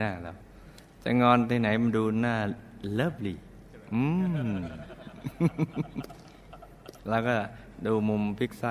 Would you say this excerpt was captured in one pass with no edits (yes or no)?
no